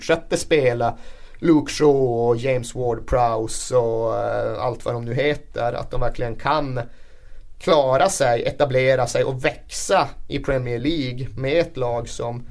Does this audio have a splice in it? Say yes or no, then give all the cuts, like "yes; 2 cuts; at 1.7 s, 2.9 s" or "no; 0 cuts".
no; 0 cuts